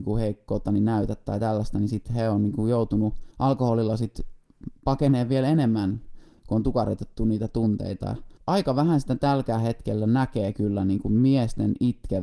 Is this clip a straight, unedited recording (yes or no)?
no